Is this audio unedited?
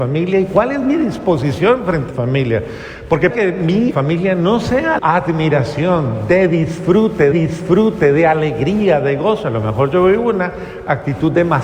no; 5 cuts; at 2.1 s, 3.3 s, 3.9 s, 5.0 s, 7.3 s

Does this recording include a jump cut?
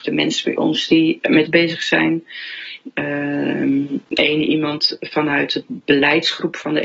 yes; 1 cut; at 1.5 s

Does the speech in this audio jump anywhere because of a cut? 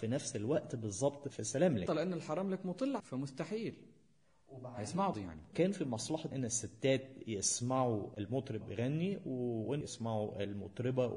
yes; 7 cuts; at 1.9 s, 3.0 s, 5.1 s, 5.5 s, 6.3 s, 8.6 s, 9.8 s

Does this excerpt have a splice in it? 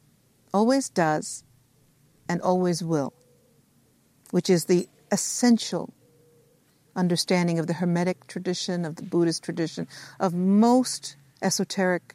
no; 0 cuts

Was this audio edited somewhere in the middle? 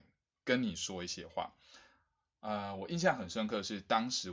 no; 0 cuts

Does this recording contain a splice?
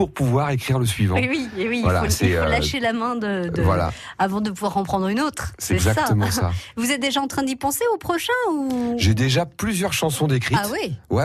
no; 0 cuts

